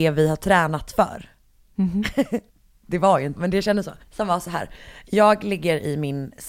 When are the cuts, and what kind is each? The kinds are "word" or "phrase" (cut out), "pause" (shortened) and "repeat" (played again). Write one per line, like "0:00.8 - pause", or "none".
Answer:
0:02.5 - pause
0:03.4 - word
0:04.0 - pause